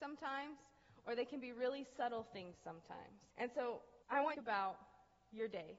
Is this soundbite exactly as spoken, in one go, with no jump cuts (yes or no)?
no